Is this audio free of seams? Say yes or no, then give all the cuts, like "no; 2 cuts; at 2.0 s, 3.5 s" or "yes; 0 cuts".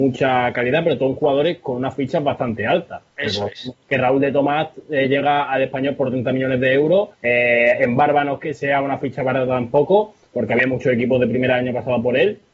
no; 2 cuts; at 3.8 s, 7.1 s